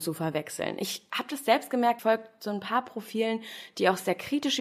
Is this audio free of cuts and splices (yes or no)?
no